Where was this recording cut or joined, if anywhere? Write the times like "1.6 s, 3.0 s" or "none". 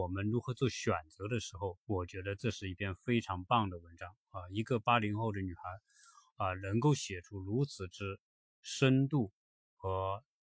1.8 s